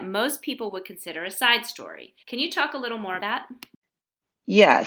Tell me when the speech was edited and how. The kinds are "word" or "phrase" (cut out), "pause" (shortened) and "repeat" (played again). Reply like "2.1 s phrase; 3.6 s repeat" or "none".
2.2 s pause; 3.2 s word